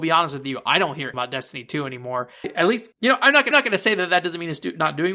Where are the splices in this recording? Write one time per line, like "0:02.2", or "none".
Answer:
0:01.1
0:02.4
0:02.9
0:03.5